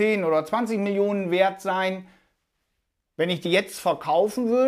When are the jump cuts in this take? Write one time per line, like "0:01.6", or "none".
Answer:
0:03.5